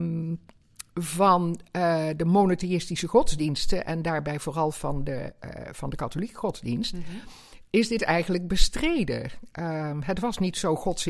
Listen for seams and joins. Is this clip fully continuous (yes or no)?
yes